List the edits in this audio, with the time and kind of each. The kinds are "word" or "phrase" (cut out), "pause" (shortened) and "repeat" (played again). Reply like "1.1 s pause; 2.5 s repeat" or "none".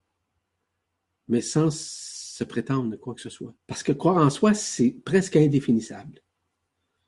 3.6 s pause